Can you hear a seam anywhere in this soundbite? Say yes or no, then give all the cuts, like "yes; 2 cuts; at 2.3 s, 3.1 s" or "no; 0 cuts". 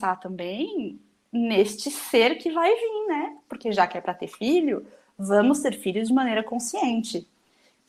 no; 0 cuts